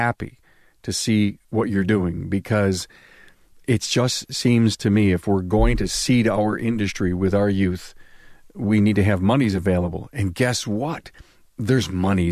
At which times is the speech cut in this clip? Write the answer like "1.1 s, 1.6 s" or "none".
1.4 s